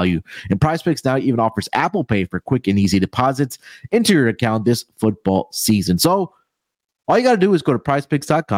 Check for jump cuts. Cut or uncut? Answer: uncut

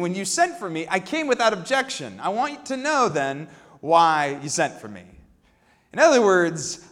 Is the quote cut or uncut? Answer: uncut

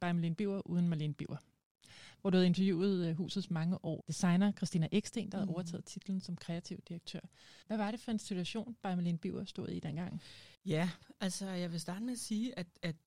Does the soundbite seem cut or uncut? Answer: cut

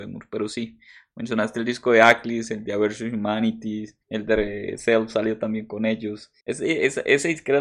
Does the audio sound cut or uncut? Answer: cut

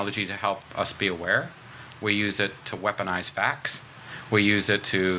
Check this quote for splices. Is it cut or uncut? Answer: uncut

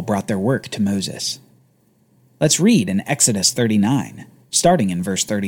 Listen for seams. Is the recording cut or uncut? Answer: uncut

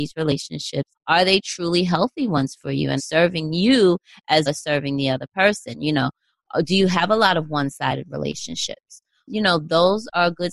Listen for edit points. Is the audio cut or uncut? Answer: cut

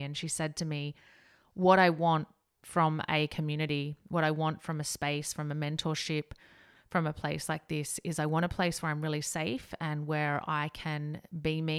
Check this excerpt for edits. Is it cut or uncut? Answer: uncut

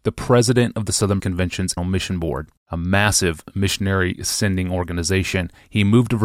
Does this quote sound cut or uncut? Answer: cut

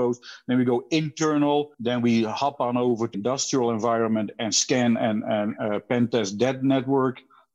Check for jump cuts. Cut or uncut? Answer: cut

